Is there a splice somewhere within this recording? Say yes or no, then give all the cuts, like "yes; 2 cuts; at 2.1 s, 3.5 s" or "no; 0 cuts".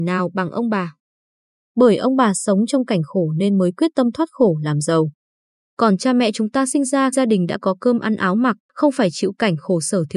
yes; 2 cuts; at 7.1 s, 8.6 s